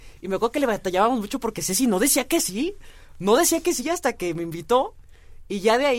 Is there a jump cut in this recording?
no; 0 cuts

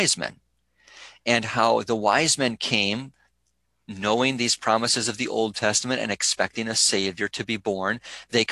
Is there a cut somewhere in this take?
no; 0 cuts

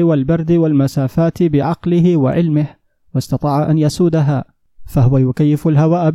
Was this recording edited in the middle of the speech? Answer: no; 0 cuts

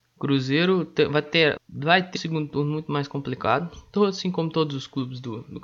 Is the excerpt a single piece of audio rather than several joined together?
no; 2 cuts; at 1.6 s, 2.1 s

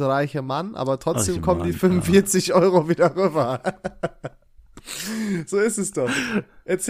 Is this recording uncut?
yes; 0 cuts

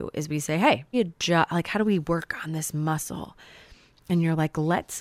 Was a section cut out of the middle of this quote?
yes; 1 cut; at 0.9 s

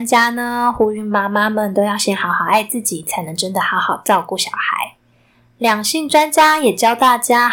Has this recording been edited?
no; 0 cuts

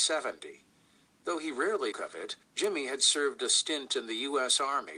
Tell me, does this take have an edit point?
yes; 2 cuts; at 1.9 s, 2.4 s

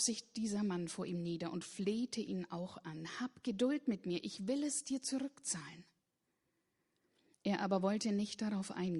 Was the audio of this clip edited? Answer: no; 0 cuts

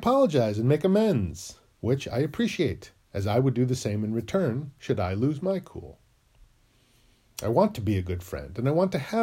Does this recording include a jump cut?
no; 0 cuts

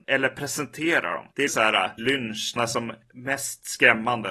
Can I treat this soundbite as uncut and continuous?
no; 3 cuts; at 1.5 s, 2.0 s, 2.6 s

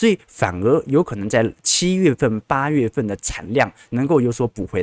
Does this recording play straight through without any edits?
yes; 0 cuts

